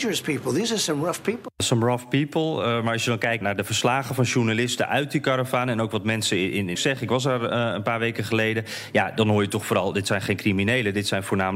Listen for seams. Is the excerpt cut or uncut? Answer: cut